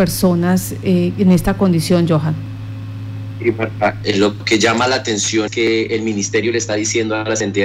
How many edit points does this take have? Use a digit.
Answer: 1